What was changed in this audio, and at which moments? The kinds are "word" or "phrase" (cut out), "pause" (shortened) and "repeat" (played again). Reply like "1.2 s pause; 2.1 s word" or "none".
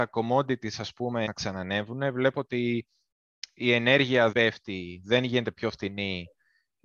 1.3 s phrase; 4.3 s word